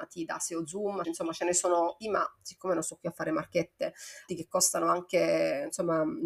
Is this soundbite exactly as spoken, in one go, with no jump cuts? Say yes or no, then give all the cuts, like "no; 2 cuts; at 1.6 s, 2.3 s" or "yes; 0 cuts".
no; 3 cuts; at 1.0 s, 2.0 s, 4.3 s